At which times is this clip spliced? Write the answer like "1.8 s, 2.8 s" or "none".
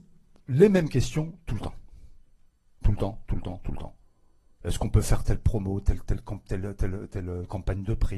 none